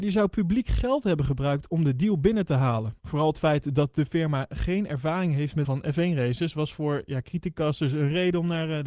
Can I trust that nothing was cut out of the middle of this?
no; 2 cuts; at 3.0 s, 5.6 s

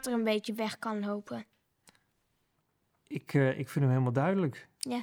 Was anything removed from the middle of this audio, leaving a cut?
no; 0 cuts

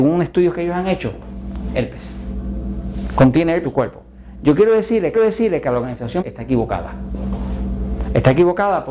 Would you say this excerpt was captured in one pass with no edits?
no; 4 cuts; at 1.7 s, 3.6 s, 5.1 s, 6.2 s

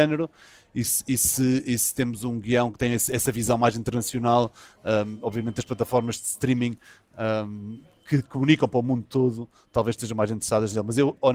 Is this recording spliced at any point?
no; 0 cuts

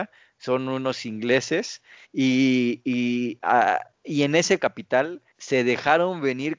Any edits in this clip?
yes; 4 cuts; at 2.0 s, 3.9 s, 4.6 s, 5.3 s

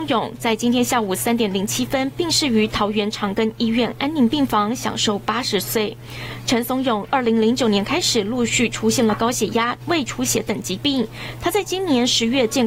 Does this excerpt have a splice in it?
yes; 1 cut; at 9.8 s

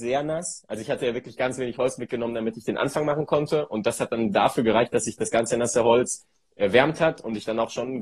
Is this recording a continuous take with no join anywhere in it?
yes; 0 cuts

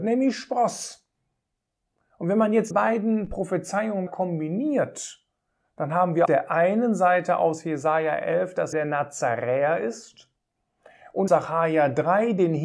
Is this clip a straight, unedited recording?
no; 5 cuts; at 2.7 s, 4.1 s, 6.3 s, 8.7 s, 11.3 s

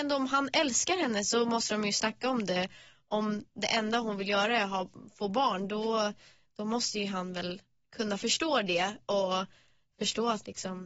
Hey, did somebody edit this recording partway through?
no; 0 cuts

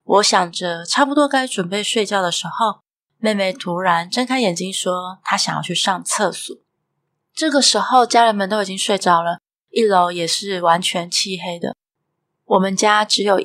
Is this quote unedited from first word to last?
yes; 0 cuts

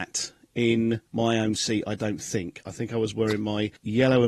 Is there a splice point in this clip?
no; 0 cuts

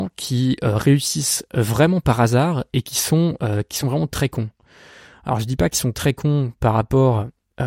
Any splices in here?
no; 0 cuts

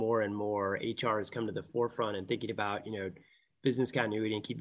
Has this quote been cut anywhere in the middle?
no; 0 cuts

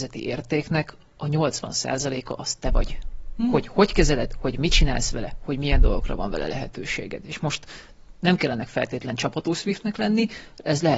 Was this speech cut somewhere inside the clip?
no; 0 cuts

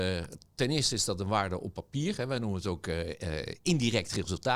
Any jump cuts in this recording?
no; 0 cuts

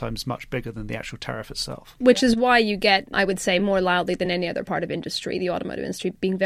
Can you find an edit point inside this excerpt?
no; 0 cuts

